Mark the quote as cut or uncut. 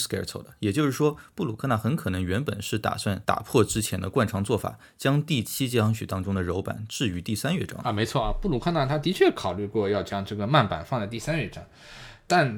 cut